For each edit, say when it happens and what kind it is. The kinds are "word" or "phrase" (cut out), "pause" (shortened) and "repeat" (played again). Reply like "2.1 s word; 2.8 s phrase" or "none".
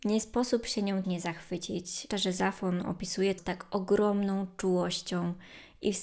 1.0 s word; 2.1 s word; 3.4 s word